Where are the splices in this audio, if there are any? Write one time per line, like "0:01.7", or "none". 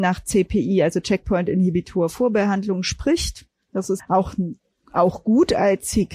0:04.0